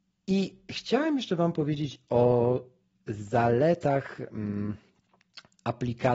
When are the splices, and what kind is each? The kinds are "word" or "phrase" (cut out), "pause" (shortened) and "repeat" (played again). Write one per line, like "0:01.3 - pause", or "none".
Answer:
none